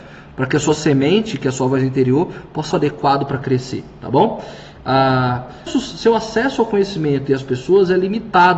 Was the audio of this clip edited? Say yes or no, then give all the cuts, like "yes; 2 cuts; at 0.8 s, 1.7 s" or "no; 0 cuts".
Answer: yes; 2 cuts; at 2.7 s, 5.7 s